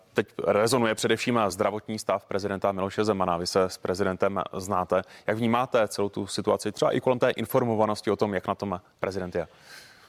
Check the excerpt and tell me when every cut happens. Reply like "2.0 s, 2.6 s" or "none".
none